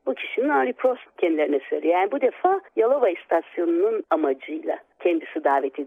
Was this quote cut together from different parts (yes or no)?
yes